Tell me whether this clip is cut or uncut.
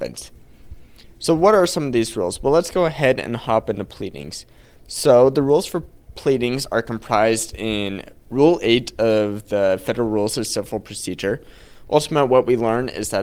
uncut